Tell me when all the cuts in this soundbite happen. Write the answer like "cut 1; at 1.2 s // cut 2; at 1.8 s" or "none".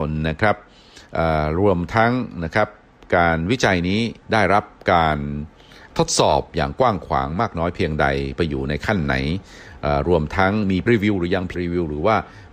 cut 1; at 4.2 s // cut 2; at 10.9 s // cut 3; at 11.5 s